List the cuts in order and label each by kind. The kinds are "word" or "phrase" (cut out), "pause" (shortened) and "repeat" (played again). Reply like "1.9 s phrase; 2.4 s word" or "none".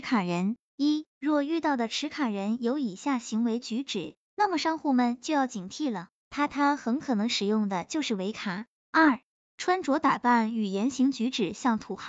1.1 s pause